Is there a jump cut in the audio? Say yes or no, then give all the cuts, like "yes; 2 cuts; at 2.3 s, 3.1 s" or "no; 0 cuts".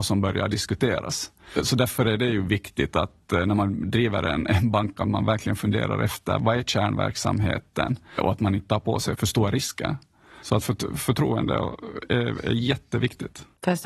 no; 0 cuts